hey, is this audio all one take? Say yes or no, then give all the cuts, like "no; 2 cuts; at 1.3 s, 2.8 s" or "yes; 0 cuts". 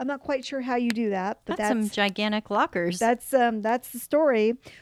yes; 0 cuts